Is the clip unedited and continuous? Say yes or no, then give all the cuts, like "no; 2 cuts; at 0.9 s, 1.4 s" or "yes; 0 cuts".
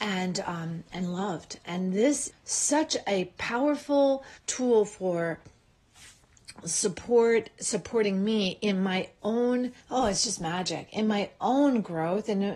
no; 3 cuts; at 2.3 s, 4.4 s, 9.8 s